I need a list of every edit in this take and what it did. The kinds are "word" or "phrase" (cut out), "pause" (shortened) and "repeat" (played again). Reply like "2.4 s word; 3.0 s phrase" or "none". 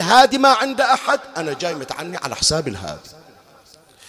none